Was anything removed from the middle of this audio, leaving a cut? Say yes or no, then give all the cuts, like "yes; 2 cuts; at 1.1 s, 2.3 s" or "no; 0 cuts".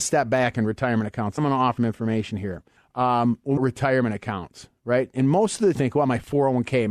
yes; 6 cuts; at 1.4 s, 1.8 s, 2.8 s, 3.6 s, 4.8 s, 5.7 s